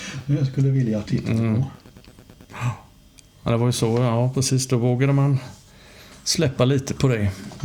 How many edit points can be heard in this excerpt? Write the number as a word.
one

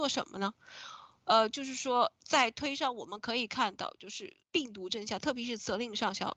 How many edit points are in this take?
one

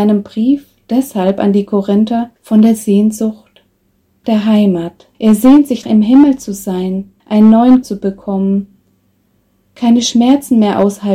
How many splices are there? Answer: six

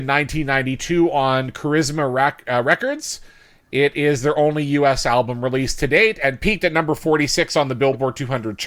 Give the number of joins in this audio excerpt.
zero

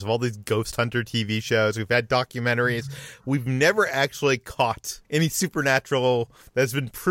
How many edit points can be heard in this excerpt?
one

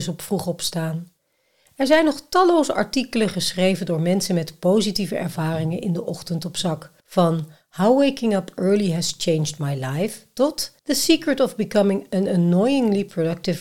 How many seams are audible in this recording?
two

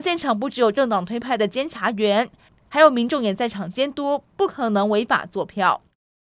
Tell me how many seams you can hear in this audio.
zero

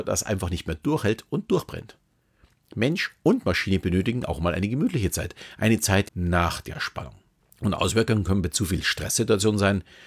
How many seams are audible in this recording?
two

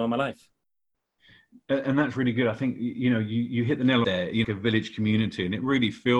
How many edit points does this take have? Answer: two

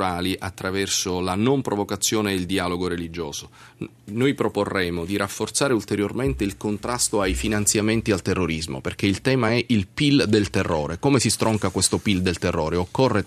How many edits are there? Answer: zero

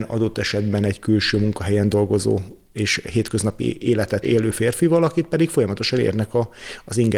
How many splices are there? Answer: one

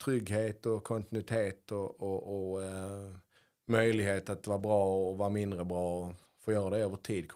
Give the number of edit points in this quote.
one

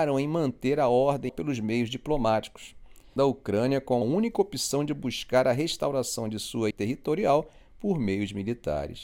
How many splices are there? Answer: four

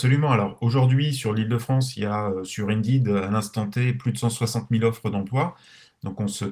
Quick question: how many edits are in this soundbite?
zero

